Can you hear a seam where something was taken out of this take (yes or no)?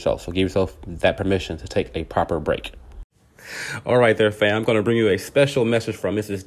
no